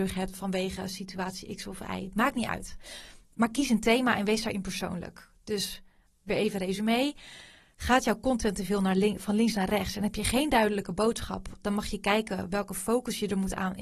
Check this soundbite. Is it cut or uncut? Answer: uncut